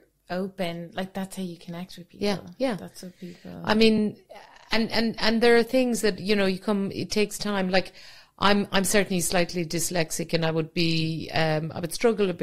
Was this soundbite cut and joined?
no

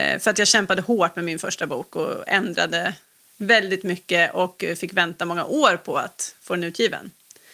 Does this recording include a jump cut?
no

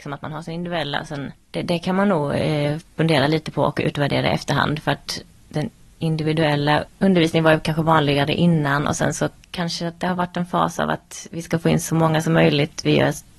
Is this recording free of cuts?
yes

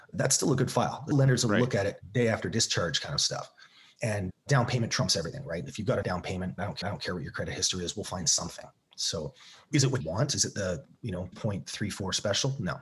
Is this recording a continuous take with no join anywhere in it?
no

